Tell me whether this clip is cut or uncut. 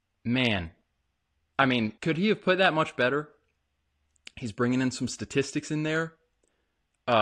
cut